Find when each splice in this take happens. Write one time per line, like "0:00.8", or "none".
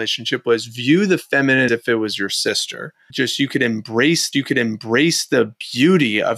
0:01.7
0:04.3